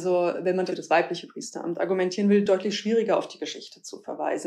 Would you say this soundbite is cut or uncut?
uncut